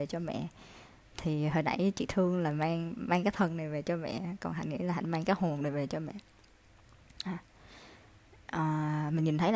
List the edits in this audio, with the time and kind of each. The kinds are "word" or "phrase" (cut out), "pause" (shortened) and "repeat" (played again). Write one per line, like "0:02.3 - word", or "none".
none